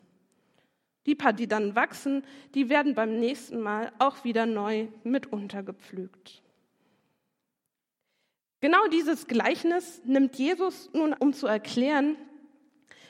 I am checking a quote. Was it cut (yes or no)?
yes